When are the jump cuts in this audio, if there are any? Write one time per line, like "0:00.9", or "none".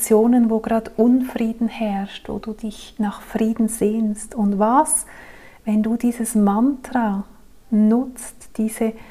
none